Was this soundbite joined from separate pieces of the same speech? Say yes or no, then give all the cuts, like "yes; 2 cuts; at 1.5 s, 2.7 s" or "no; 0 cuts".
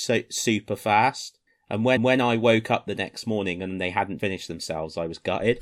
yes; 3 cuts; at 1.5 s, 2.0 s, 4.2 s